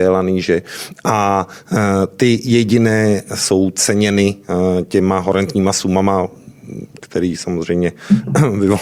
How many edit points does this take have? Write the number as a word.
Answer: zero